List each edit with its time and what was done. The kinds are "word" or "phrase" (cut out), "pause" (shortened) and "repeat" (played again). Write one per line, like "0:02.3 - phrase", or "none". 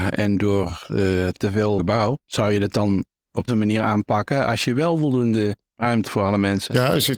0:01.8 - phrase
0:02.2 - pause
0:03.5 - word
0:06.0 - word